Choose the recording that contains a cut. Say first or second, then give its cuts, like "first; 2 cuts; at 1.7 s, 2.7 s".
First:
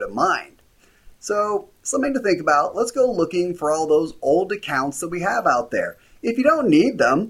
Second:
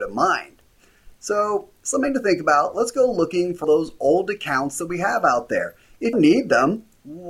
second; 2 cuts; at 3.6 s, 6.1 s